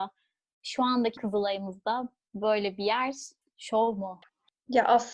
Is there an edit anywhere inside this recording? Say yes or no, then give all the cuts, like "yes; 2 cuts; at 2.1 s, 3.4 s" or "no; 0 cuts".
yes; 2 cuts; at 1.2 s, 3.4 s